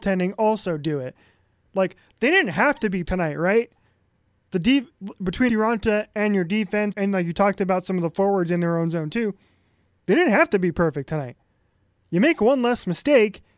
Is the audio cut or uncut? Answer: cut